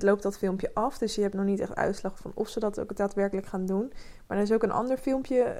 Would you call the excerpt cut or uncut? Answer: uncut